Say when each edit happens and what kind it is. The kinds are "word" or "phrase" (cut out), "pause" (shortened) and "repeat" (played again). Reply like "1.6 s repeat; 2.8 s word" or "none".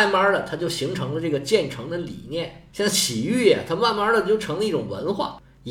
2.7 s pause